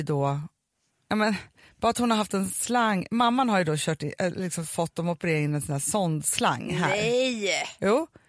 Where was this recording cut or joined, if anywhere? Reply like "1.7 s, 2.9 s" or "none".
none